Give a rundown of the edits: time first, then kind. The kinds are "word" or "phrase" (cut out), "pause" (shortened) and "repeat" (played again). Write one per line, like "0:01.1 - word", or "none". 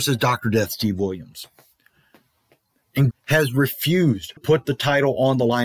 0:03.1 - word
0:04.4 - word

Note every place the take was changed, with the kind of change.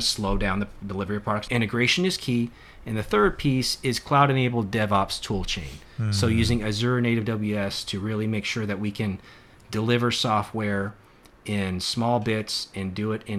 0:01.5 - phrase

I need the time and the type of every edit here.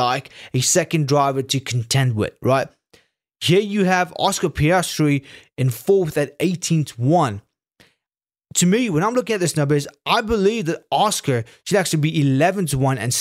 none

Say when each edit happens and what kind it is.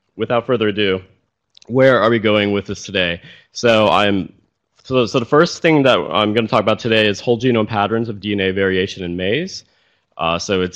none

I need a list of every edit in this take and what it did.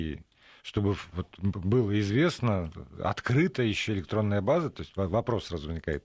none

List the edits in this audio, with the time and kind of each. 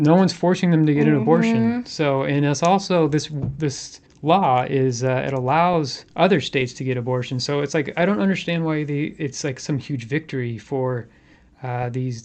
0:04.1 - pause
0:06.1 - pause

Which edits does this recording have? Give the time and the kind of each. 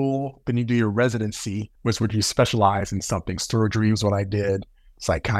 0:01.7 - pause

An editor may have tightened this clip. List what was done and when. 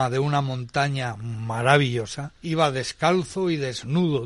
0:02.4 - pause

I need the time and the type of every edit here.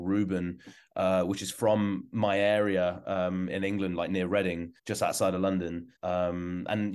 0:03.5 - word
0:04.8 - pause
0:06.0 - pause

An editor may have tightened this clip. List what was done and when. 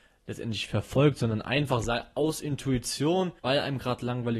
0:03.4 - pause

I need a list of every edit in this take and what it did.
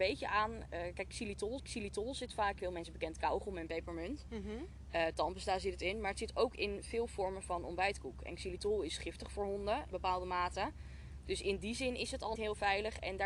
0:01.6 - repeat
0:02.6 - phrase
0:09.9 - word
0:12.4 - word

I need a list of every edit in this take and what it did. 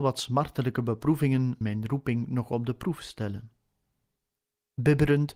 0:01.6 - word

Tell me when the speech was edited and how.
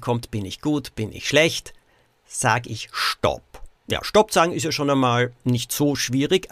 0:03.8 - pause

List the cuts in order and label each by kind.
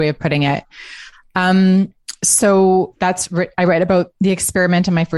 none

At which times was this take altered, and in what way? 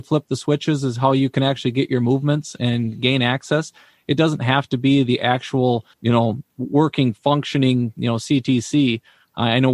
0:05.9 - pause

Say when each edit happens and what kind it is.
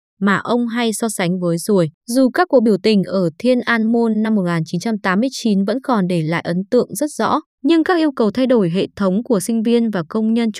0:02.0 - pause
0:07.5 - pause

